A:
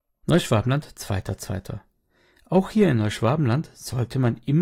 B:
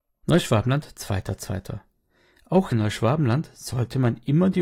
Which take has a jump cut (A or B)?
B